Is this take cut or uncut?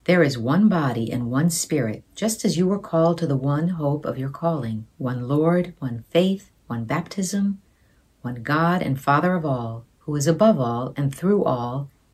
cut